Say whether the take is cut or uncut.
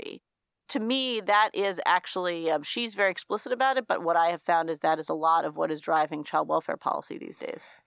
uncut